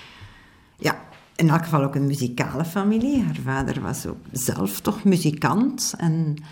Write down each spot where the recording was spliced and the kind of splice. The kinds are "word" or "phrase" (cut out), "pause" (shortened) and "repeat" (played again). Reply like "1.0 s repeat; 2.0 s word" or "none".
4.2 s word